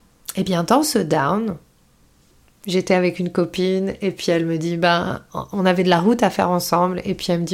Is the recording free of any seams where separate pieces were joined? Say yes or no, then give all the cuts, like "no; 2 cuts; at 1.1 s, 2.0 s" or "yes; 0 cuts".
yes; 0 cuts